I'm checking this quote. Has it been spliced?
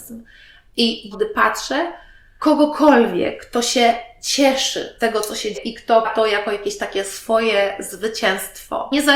yes; 5 cuts; at 1.1 s, 2.4 s, 5.0 s, 5.5 s, 6.0 s

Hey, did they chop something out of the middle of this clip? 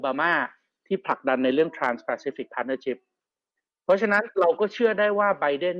no; 0 cuts

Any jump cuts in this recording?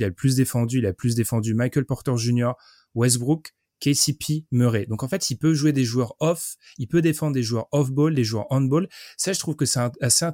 no; 0 cuts

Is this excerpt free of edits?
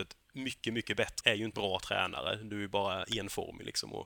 no; 2 cuts; at 1.2 s, 1.5 s

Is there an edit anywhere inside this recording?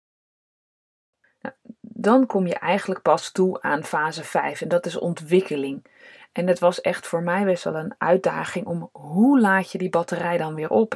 no; 0 cuts

